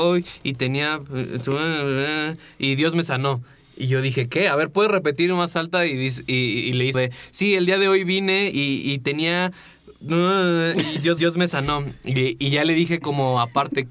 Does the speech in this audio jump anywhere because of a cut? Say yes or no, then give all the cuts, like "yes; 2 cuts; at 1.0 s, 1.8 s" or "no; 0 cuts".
yes; 3 cuts; at 6.9 s, 8.5 s, 11.2 s